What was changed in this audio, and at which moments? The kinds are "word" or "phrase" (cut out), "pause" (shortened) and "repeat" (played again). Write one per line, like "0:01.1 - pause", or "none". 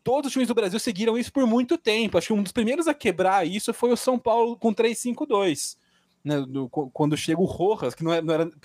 none

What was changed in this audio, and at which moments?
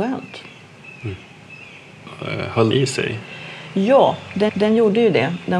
0:02.7 - phrase
0:04.5 - repeat

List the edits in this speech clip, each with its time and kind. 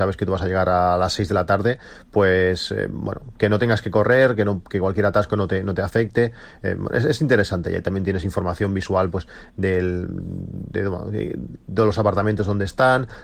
none

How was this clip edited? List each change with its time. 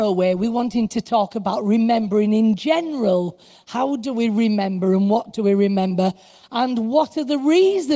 none

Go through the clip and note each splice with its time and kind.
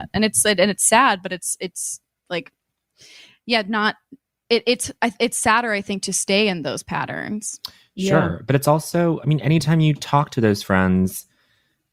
none

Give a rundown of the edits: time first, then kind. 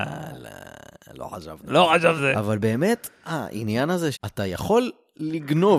0:02.2 - word
0:04.1 - word

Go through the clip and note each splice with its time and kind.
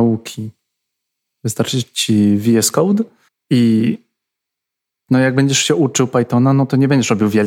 0:03.3 - pause

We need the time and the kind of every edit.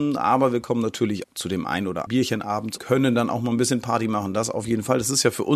0:01.2 - word
0:02.1 - word
0:02.8 - word

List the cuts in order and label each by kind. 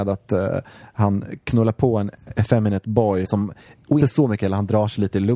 0:02.2 - pause
0:03.2 - word
0:04.0 - word

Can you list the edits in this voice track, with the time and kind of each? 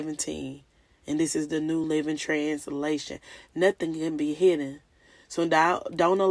none

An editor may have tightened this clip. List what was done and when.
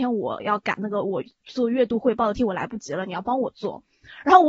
0:02.3 - word

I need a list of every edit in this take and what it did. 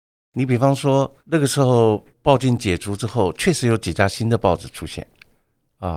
0:01.2 - pause
0:02.1 - pause

